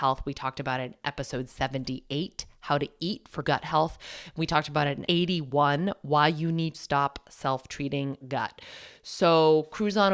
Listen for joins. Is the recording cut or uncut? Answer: cut